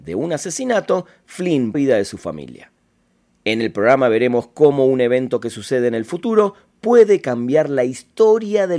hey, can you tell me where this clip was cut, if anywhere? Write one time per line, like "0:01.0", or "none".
0:01.7